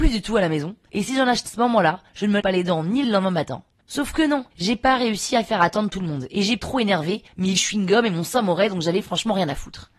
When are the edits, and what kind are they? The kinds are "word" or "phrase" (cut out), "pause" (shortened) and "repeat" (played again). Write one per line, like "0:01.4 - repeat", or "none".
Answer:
0:01.5 - phrase
0:02.4 - word
0:03.0 - phrase
0:04.5 - pause
0:06.6 - word
0:07.6 - word